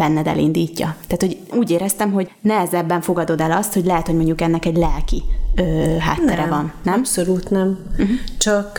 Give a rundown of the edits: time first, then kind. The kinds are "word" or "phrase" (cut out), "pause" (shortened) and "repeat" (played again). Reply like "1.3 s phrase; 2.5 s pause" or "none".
1.5 s word